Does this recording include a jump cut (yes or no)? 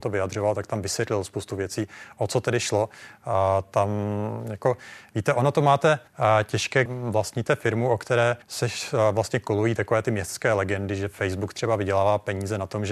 yes